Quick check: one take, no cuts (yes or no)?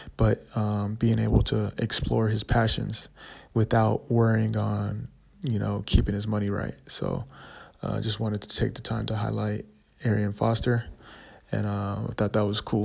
yes